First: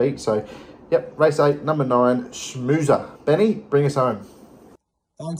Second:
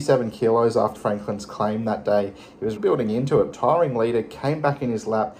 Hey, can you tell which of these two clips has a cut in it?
second; 3 cuts; at 0.9 s, 2.8 s, 3.5 s

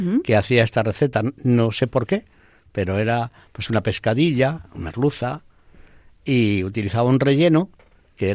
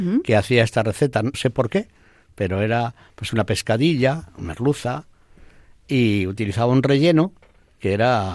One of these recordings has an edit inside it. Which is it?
second; 1 cut; at 1.3 s

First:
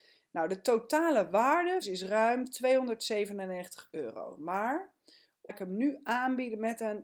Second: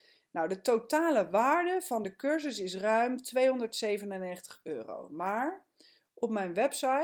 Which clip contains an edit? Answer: first; 2 cuts; at 1.8 s, 5.5 s

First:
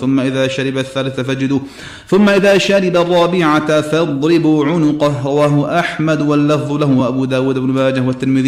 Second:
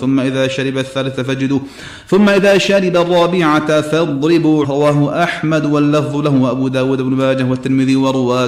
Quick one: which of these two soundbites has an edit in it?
second; 1 cut; at 4.6 s

